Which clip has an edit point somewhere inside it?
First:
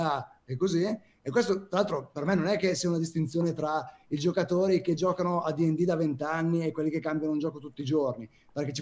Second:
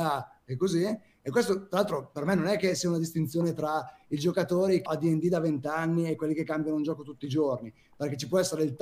second; 1 cut; at 4.9 s

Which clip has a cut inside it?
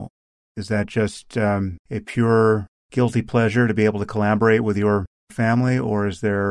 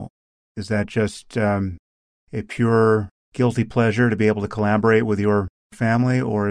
first; 1 cut; at 1.8 s

